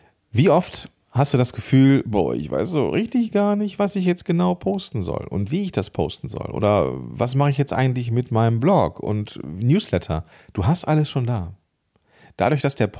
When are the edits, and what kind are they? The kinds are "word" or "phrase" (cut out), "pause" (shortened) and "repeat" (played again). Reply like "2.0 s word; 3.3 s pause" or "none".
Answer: 10.3 s pause